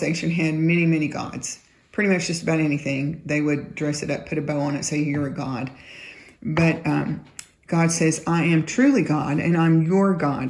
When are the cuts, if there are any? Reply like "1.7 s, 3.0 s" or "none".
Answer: none